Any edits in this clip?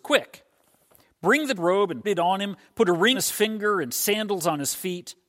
yes; 3 cuts; at 1.6 s, 2.0 s, 3.1 s

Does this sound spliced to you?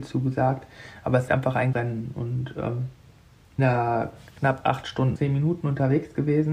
yes; 4 cuts; at 1.3 s, 1.7 s, 3.6 s, 5.2 s

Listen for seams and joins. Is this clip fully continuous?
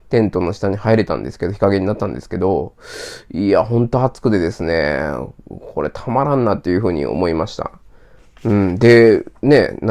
yes; 0 cuts

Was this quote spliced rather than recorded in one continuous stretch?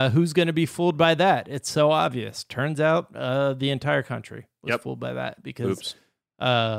no; 0 cuts

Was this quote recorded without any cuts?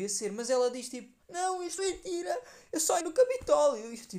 no; 3 cuts; at 1.2 s, 1.8 s, 3.0 s

